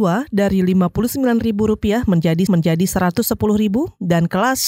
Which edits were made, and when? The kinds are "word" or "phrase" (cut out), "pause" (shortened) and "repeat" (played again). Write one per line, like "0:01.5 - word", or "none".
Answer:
0:02.5 - repeat